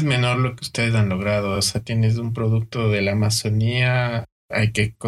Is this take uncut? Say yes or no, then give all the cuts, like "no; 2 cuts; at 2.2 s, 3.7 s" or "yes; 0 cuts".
yes; 0 cuts